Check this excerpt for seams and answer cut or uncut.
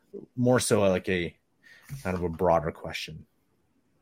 uncut